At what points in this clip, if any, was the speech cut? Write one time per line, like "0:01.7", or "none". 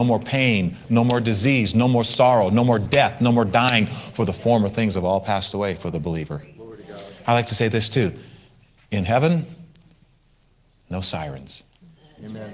none